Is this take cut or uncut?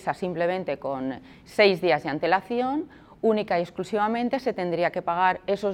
uncut